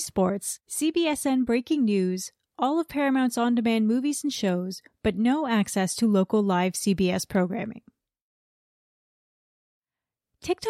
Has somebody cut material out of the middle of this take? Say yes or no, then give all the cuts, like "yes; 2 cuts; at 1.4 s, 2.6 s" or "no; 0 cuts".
no; 0 cuts